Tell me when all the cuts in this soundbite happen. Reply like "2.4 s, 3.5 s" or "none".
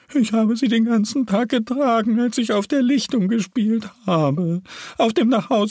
none